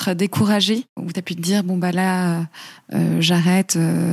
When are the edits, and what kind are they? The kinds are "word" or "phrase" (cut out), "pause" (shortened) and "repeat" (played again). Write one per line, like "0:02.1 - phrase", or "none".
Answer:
none